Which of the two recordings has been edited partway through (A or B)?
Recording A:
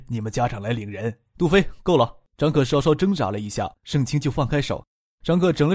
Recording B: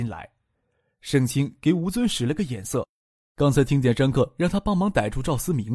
A